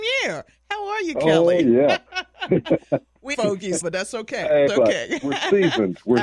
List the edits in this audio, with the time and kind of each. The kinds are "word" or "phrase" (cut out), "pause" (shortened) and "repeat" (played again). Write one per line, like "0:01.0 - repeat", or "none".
0:03.3 - word
0:03.8 - word
0:04.7 - word